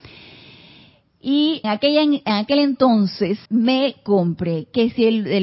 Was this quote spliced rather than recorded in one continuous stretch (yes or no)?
yes